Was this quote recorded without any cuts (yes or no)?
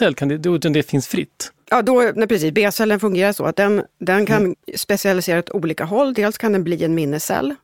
yes